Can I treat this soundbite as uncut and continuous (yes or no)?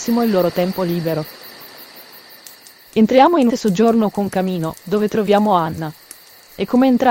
no